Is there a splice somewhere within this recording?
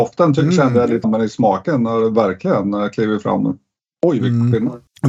yes; 1 cut; at 1.0 s

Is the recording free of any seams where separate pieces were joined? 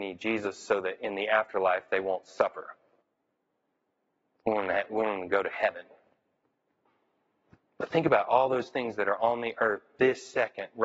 yes; 0 cuts

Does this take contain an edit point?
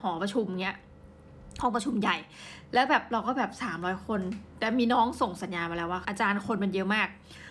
yes; 1 cut; at 6.0 s

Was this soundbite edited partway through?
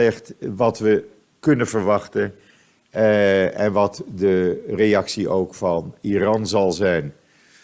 no; 0 cuts

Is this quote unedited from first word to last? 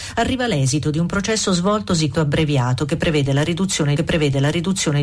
no; 2 cuts; at 2.1 s, 4.0 s

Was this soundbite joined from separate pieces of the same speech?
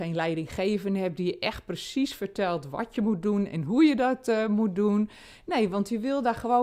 no; 0 cuts

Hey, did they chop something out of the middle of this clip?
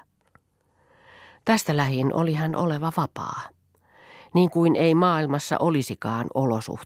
no; 0 cuts

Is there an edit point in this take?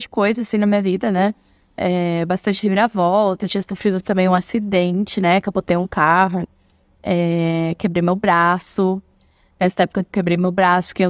no; 0 cuts

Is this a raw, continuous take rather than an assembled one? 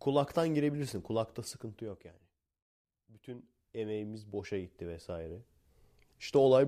yes; 0 cuts

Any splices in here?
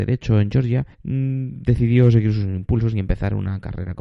yes; 1 cut; at 0.9 s

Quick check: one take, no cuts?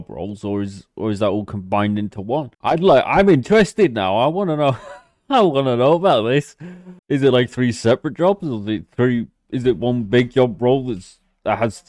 no; 2 cuts; at 2.5 s, 7.0 s

